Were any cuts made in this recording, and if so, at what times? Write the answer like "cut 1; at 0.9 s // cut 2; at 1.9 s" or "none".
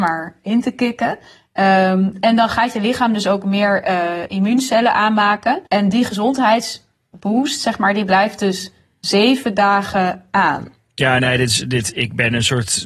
cut 1; at 5.7 s